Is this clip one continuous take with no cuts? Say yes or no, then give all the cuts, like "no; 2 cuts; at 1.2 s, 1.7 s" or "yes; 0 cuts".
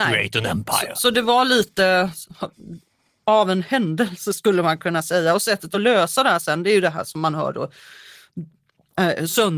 yes; 0 cuts